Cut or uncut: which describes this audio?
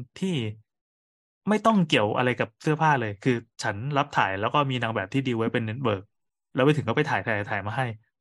cut